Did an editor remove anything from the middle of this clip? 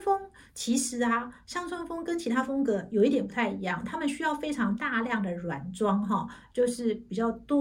no; 0 cuts

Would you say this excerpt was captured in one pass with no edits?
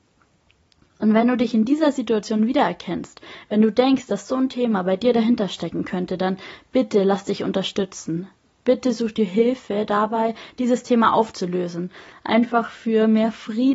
yes; 0 cuts

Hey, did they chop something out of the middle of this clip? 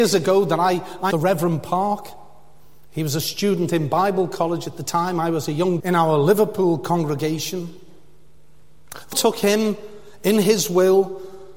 yes; 3 cuts; at 1.1 s, 5.8 s, 9.1 s

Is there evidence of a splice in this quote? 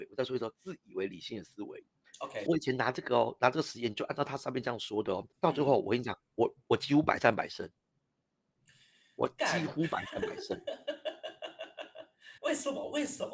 yes; 3 cuts; at 2.5 s, 5.3 s, 12.4 s

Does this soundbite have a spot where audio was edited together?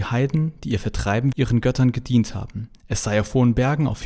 yes; 1 cut; at 1.3 s

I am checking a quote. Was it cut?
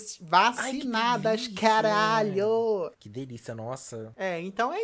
yes; 1 cut; at 2.9 s

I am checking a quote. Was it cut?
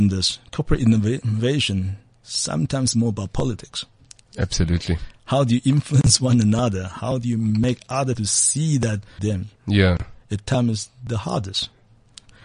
yes; 3 cuts; at 8.1 s, 9.2 s, 9.6 s

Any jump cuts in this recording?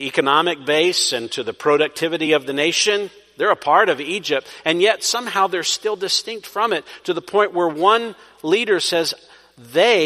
no; 0 cuts

